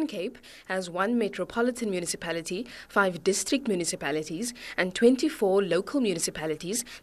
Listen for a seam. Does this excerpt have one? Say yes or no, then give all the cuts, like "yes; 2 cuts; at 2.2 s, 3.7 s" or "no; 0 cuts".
no; 0 cuts